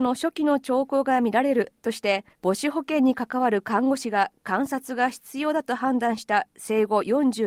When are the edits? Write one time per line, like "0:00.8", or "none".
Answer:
0:02.3

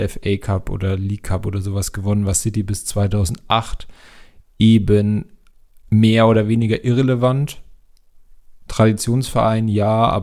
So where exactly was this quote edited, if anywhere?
none

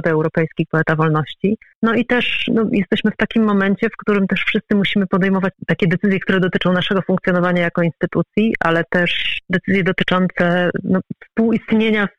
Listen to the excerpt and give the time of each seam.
0:01.7

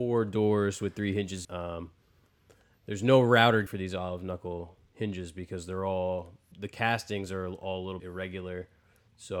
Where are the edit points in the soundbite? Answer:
0:01.4
0:03.7
0:06.5
0:08.0

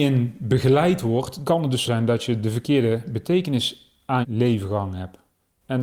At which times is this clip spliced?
0:01.4
0:01.8
0:04.2

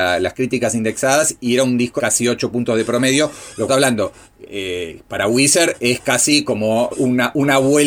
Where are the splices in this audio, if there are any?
0:02.0
0:03.7
0:06.9

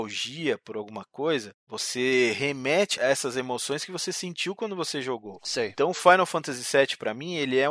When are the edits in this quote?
0:01.6

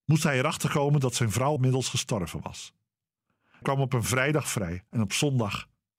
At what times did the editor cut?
0:01.6
0:03.6
0:04.9

